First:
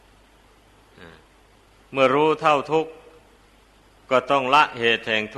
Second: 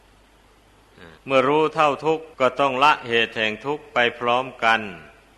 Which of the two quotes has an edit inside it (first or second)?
second